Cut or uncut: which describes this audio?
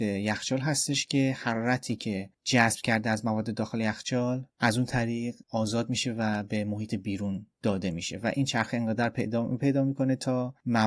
cut